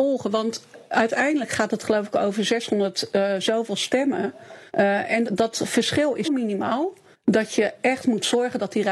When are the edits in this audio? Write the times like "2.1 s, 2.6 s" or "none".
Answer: 4.7 s, 5.2 s, 6.2 s, 7.1 s

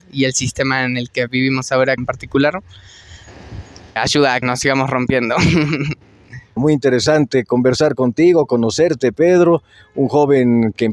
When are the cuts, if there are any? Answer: 2.0 s, 4.0 s, 4.4 s, 6.6 s

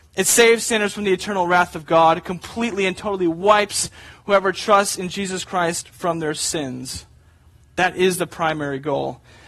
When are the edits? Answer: none

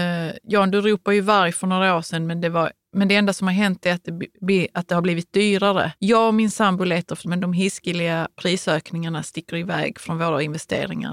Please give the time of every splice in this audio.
6.0 s, 7.2 s

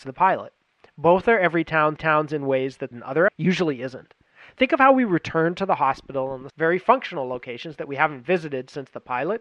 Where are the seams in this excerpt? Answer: 2.0 s, 2.9 s, 3.3 s, 6.5 s

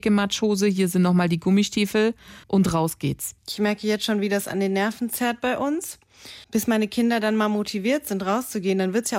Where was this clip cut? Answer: 2.4 s, 6.4 s

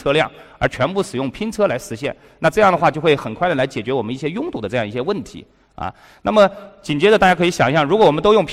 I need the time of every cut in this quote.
none

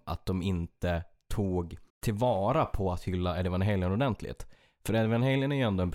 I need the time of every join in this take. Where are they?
1.9 s

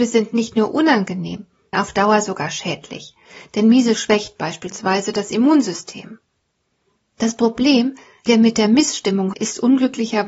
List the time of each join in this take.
1.7 s, 4.0 s, 8.3 s, 9.3 s

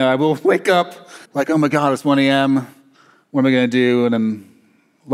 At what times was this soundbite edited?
1.2 s

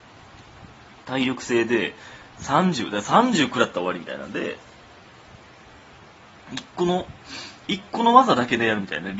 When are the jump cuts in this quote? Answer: none

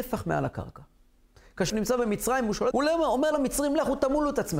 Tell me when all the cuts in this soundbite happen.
1.7 s, 2.7 s, 3.3 s

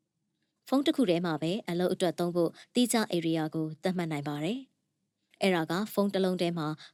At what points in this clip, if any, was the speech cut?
none

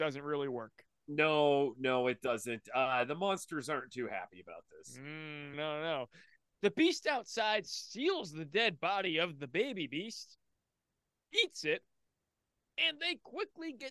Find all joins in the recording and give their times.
5.5 s

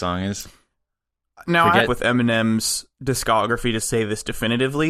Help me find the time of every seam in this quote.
1.9 s, 2.9 s

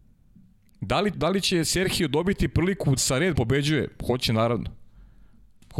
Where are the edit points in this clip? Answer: 1.1 s, 3.0 s, 3.3 s

